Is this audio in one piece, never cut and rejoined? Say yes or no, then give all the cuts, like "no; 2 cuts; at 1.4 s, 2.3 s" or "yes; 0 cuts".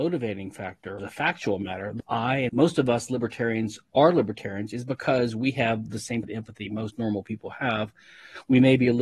no; 4 cuts; at 1.0 s, 2.0 s, 2.5 s, 6.2 s